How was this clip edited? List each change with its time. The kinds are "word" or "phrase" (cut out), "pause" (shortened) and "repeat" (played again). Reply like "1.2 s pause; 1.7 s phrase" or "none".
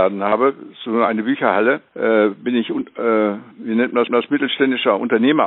1.9 s pause; 3.5 s pause; 4.1 s repeat